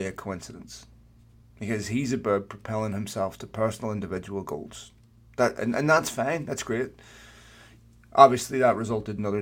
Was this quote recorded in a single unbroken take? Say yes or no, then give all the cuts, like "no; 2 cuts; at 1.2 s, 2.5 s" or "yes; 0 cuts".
yes; 0 cuts